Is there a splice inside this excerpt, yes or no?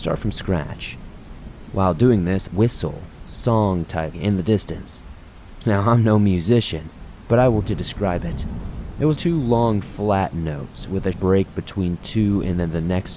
yes